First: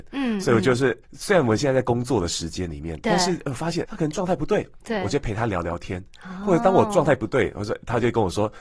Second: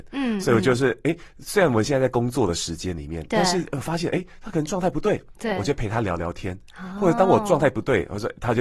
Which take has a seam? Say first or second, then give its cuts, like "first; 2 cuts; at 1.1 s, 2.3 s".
first; 2 cuts; at 1.0 s, 3.8 s